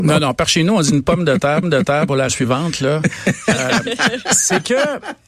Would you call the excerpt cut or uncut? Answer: cut